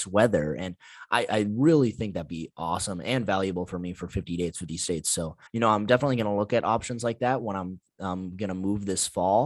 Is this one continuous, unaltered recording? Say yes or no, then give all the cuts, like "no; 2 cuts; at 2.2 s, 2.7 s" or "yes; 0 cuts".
no; 1 cut; at 5.5 s